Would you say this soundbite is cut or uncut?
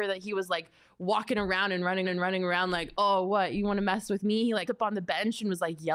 cut